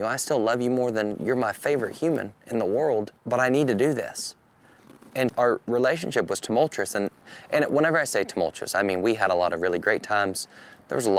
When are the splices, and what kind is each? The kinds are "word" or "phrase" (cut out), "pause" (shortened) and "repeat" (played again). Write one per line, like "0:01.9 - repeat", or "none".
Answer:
0:03.2 - pause
0:05.3 - word